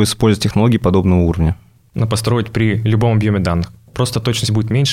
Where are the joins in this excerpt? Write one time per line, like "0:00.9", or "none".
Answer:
0:02.0